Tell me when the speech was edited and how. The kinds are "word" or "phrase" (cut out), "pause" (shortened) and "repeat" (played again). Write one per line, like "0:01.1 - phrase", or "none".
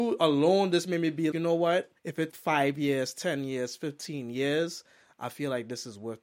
0:01.3 - word
0:02.0 - pause
0:02.3 - word